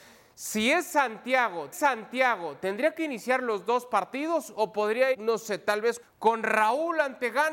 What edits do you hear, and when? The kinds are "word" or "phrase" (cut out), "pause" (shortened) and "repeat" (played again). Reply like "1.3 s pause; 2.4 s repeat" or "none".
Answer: 1.7 s repeat; 5.1 s word; 6.0 s word